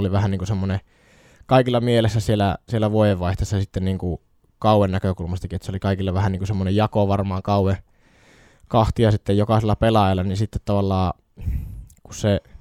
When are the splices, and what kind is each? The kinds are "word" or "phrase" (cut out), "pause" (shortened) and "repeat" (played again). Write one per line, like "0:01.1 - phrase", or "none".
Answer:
none

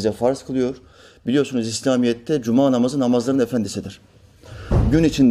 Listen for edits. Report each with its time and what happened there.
none

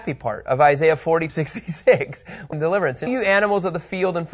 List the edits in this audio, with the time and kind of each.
0:01.3 - word
0:02.5 - phrase
0:03.1 - phrase

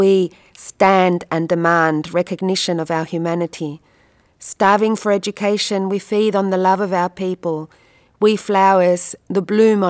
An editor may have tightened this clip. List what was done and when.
none

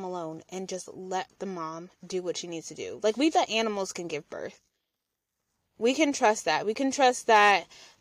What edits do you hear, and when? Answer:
0:03.3 - word

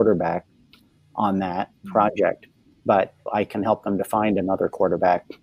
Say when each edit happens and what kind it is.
0:03.3 - word

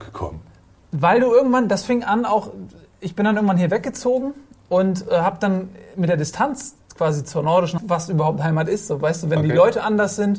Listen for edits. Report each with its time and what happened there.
0:07.8 - phrase

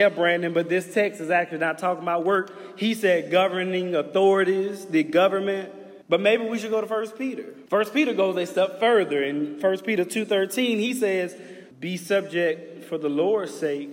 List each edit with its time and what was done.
0:06.0 - pause
0:07.7 - pause
0:11.7 - pause

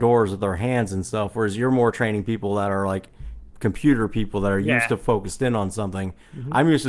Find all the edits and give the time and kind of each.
0:03.5 - pause

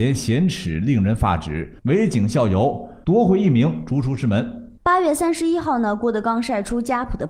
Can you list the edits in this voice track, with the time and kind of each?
0:01.8 - pause
0:04.8 - pause

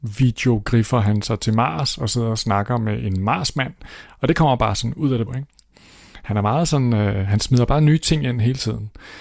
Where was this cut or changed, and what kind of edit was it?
0:05.3 - word

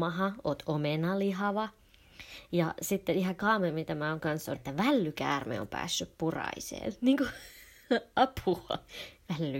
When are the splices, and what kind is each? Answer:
0:04.2 - word
0:04.6 - word

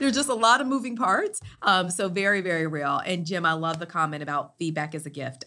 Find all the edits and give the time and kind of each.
none

